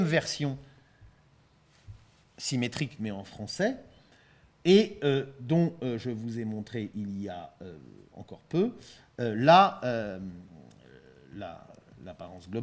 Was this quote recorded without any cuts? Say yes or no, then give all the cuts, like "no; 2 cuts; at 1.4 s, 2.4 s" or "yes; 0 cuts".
yes; 0 cuts